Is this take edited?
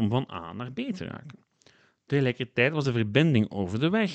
no; 0 cuts

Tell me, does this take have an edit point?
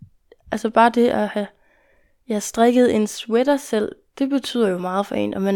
no; 0 cuts

